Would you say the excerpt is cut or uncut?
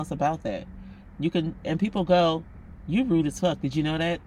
cut